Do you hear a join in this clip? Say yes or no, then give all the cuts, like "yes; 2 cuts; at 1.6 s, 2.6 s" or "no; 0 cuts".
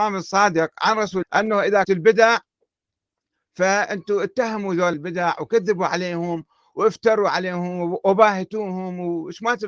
yes; 3 cuts; at 1.2 s, 1.8 s, 4.9 s